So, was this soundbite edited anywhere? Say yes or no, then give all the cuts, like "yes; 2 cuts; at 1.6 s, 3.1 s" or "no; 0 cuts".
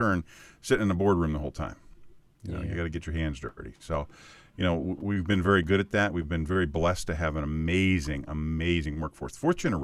no; 0 cuts